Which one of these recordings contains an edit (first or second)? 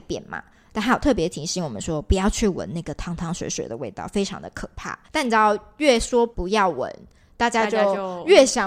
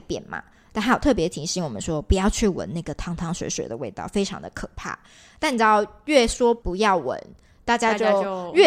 first